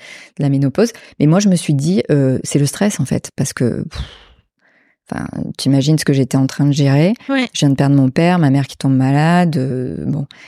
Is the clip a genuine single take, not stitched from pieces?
yes; 0 cuts

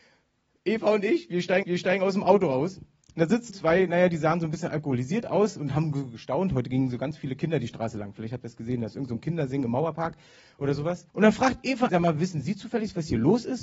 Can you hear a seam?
yes; 4 cuts; at 1.6 s, 3.5 s, 11.1 s, 11.9 s

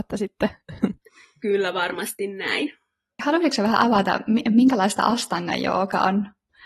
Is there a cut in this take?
no; 0 cuts

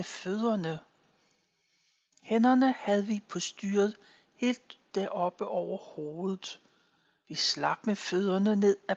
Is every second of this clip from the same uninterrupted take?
yes; 0 cuts

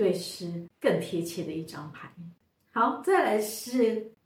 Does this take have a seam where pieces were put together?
no; 0 cuts

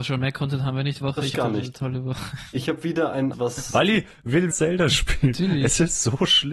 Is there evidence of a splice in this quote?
yes; 4 cuts; at 1.0 s, 1.3 s, 3.3 s, 4.5 s

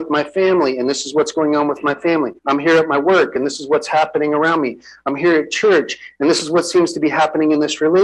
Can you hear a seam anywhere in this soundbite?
yes; 1 cut; at 2.4 s

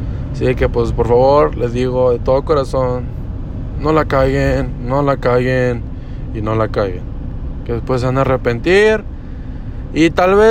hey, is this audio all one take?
yes; 0 cuts

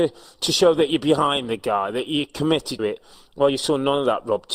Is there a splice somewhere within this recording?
yes; 1 cut; at 2.8 s

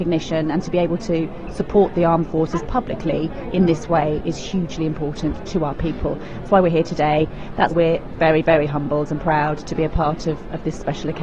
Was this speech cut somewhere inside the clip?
yes; 2 cuts; at 6.5 s, 7.7 s

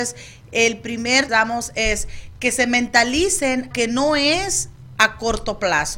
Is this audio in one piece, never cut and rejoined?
no; 2 cuts; at 1.3 s, 3.7 s

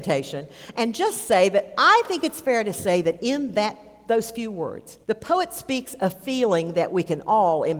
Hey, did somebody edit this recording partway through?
yes; 1 cut; at 5.0 s

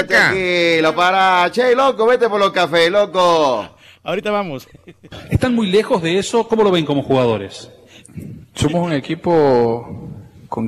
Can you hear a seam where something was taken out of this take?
no; 0 cuts

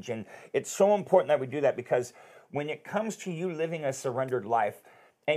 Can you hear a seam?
no; 0 cuts

